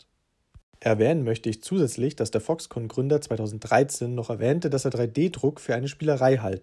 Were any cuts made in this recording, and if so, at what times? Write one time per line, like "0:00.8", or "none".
none